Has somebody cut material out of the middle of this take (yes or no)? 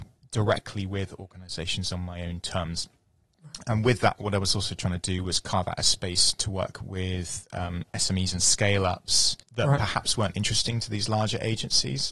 yes